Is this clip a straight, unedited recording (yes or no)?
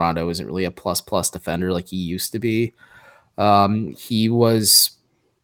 yes